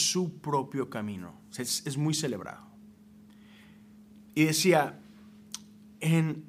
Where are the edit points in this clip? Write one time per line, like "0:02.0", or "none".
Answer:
0:04.3

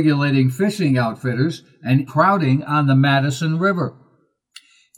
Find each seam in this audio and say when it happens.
0:02.1

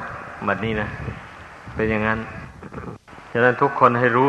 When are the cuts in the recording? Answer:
0:03.1

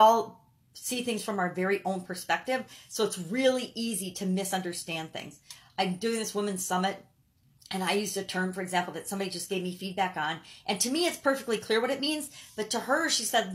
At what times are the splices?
none

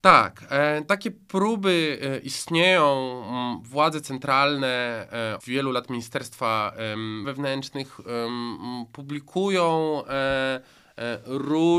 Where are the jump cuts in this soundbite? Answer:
0:05.4
0:07.2

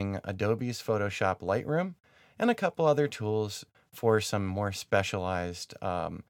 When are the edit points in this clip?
none

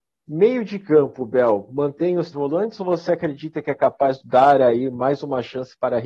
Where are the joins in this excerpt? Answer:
0:02.3
0:04.2

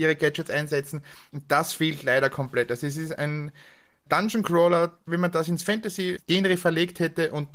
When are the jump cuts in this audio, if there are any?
none

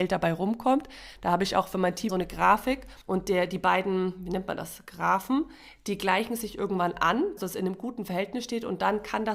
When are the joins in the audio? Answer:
0:02.1
0:03.0
0:07.4

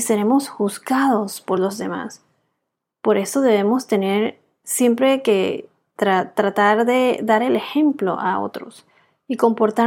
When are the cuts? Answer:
none

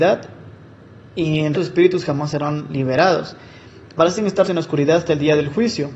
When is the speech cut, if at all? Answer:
0:01.5
0:04.4

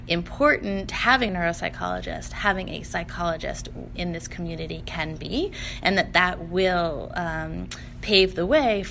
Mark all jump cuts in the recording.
0:01.3
0:03.9

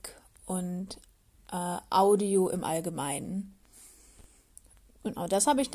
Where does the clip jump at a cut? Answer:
none

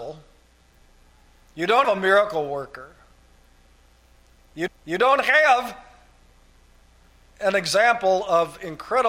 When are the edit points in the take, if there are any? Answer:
0:01.8
0:04.7

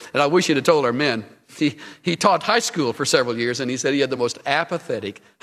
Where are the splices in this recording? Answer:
none

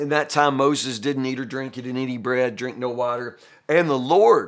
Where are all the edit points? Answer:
none

